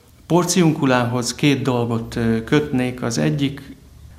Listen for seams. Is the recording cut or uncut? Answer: uncut